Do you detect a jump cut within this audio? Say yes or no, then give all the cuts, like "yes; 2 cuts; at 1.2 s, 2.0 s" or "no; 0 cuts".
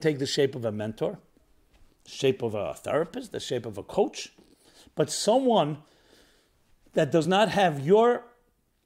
no; 0 cuts